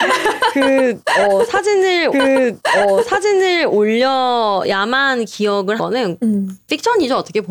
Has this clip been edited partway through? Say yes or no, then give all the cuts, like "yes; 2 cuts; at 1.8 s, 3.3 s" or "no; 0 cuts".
yes; 2 cuts; at 2.1 s, 5.8 s